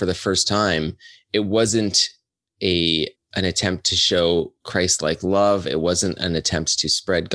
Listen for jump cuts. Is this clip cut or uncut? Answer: cut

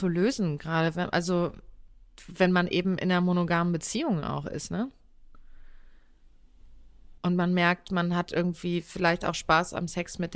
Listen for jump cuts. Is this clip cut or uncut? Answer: cut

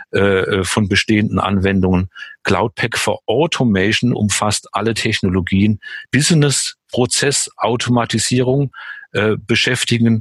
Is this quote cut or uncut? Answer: cut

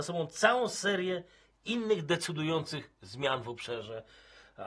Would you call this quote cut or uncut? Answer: uncut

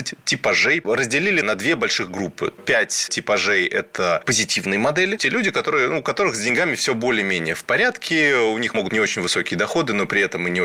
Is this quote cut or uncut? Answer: cut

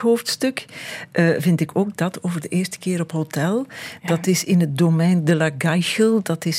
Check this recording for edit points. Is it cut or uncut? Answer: uncut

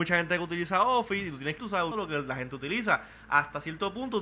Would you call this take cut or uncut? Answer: cut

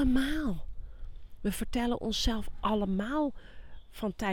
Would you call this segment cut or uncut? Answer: uncut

